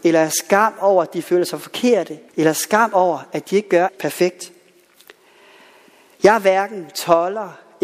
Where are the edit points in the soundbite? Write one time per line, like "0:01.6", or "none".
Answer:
0:02.3
0:03.9